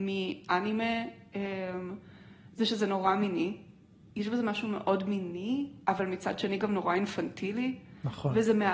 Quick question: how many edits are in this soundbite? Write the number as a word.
zero